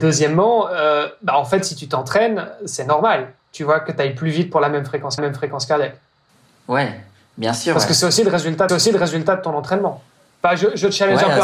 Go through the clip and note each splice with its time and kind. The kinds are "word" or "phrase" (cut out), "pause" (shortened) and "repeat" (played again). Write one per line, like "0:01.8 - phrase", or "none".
0:03.4 - pause
0:05.2 - repeat
0:08.7 - repeat